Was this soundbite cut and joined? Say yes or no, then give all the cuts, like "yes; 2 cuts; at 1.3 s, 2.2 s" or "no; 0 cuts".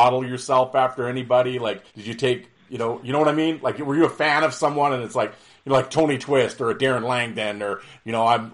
yes; 1 cut; at 1.9 s